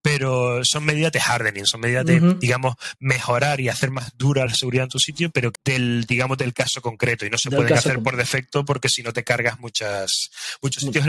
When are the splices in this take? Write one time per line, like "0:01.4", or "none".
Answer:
0:04.5
0:05.5